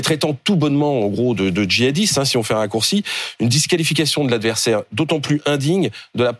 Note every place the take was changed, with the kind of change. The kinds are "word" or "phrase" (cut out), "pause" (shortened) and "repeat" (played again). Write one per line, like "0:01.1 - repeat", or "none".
none